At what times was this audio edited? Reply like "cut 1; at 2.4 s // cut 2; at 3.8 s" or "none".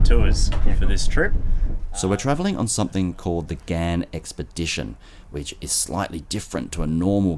none